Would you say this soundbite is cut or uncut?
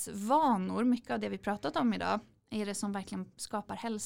uncut